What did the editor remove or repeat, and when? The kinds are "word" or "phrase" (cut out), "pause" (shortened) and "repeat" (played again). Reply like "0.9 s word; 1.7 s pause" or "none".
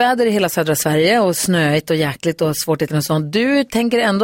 2.9 s word